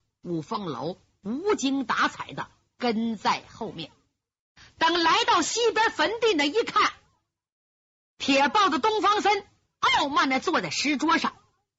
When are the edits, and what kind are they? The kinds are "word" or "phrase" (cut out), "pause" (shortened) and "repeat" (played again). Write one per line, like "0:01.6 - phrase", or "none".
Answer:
none

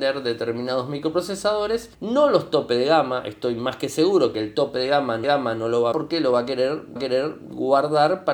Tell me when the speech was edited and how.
0:01.9 - pause
0:05.2 - repeat
0:05.9 - phrase
0:07.0 - repeat

